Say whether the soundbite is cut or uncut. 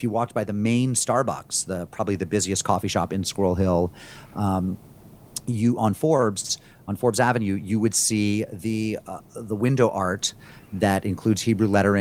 uncut